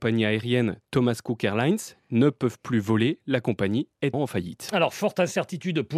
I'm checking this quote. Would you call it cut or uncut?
cut